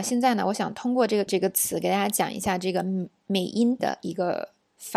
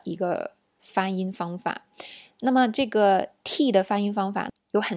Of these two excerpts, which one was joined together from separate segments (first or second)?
first